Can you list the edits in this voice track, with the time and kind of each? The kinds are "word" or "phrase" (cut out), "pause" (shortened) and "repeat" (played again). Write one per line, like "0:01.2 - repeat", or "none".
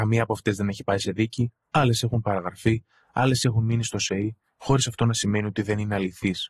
none